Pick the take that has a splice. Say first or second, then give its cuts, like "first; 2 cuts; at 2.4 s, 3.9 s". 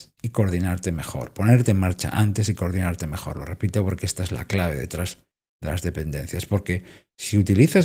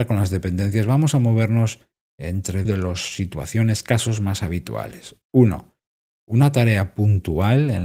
second; 2 cuts; at 2.7 s, 5.2 s